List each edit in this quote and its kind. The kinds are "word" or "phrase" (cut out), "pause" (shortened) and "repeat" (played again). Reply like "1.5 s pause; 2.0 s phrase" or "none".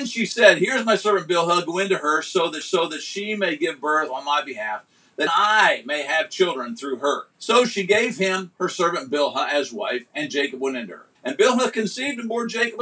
2.6 s repeat; 5.3 s word; 7.3 s pause; 11.1 s pause

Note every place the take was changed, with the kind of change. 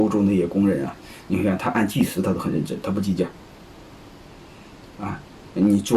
none

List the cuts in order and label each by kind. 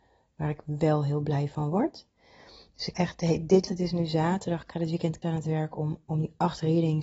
2.9 s word; 3.7 s word; 5.2 s word

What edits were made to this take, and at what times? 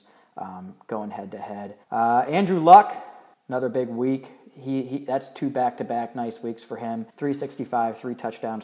1.8 s pause; 3.3 s pause; 7.1 s pause

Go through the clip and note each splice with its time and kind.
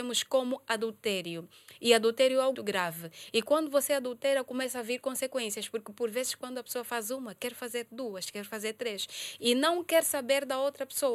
2.5 s word

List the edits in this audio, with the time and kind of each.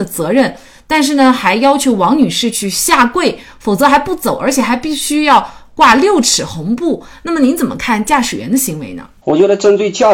9.2 s pause

